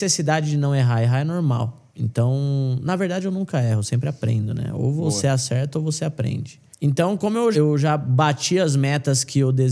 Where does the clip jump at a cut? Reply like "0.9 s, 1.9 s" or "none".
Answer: 1.9 s, 6.7 s, 7.5 s